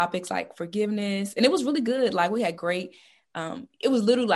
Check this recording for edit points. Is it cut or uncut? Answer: uncut